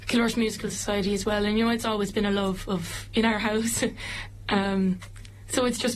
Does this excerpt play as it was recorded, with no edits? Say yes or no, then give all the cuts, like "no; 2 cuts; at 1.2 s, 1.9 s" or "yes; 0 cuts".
yes; 0 cuts